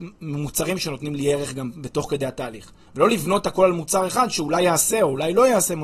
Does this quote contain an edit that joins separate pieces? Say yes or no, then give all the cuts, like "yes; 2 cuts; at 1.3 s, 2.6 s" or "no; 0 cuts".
no; 0 cuts